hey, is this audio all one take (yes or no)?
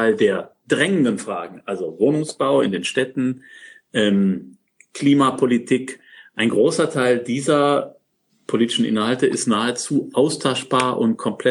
yes